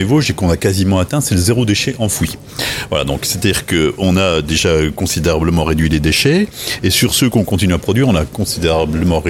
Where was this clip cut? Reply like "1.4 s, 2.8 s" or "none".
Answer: none